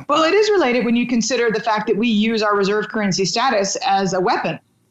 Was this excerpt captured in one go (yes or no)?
yes